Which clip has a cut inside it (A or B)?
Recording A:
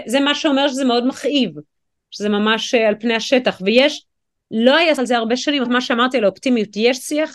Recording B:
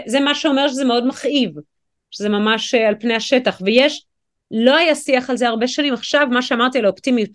A